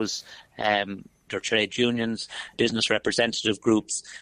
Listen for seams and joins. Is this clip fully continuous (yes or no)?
no